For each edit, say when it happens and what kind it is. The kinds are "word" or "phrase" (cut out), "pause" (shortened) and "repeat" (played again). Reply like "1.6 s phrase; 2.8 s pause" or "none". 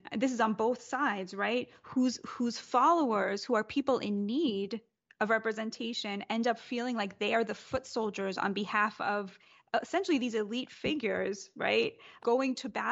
none